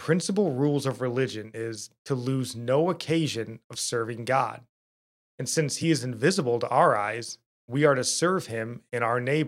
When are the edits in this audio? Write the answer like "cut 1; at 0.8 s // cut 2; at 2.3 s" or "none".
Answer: none